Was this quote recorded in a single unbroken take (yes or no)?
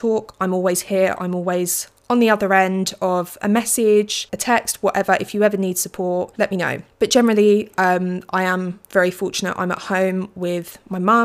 yes